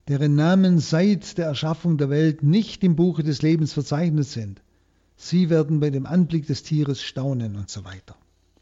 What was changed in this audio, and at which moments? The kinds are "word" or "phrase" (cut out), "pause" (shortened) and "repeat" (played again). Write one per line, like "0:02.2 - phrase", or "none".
none